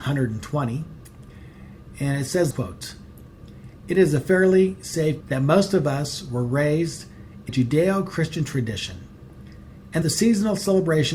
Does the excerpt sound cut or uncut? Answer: cut